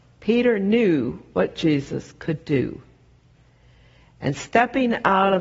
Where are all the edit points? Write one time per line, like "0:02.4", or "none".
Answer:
none